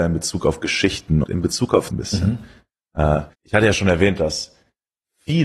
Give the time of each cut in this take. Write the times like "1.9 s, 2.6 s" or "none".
1.2 s, 1.9 s, 3.3 s